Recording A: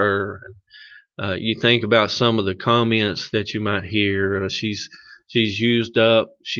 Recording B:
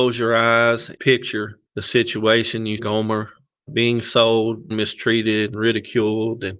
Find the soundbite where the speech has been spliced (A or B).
B